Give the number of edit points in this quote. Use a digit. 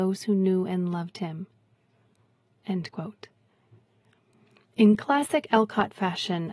0